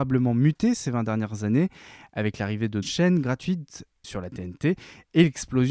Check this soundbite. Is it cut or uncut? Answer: cut